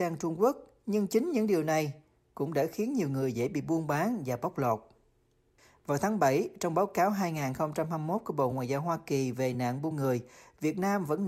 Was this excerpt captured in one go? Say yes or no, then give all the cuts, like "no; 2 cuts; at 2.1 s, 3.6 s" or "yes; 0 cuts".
yes; 0 cuts